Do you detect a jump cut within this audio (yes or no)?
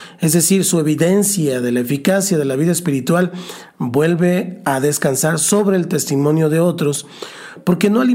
no